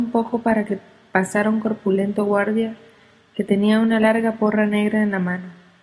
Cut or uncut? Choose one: uncut